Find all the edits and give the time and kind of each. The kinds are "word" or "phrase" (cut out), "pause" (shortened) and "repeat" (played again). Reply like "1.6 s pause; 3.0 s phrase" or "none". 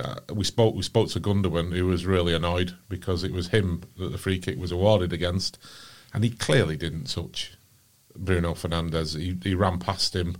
none